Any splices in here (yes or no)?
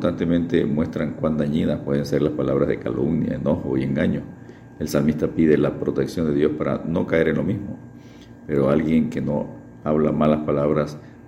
no